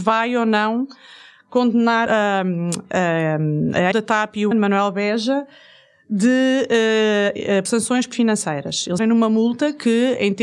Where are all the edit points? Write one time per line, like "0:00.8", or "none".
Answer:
0:02.1
0:03.9
0:04.5
0:07.7
0:08.1
0:09.0